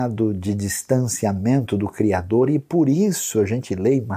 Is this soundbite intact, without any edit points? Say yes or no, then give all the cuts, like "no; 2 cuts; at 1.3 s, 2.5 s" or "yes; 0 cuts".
yes; 0 cuts